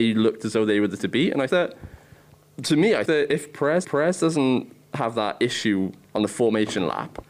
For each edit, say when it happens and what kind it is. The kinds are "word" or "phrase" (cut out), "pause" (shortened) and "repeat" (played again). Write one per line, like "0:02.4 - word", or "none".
0:01.0 - word
0:01.5 - word
0:03.1 - word
0:03.8 - repeat